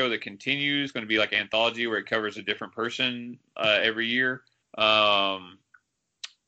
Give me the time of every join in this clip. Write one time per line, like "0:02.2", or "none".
0:04.6